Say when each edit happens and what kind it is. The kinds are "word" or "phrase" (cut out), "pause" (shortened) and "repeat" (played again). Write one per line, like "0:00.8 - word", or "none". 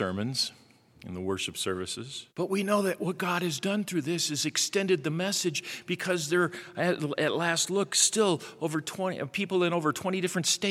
0:02.3 - pause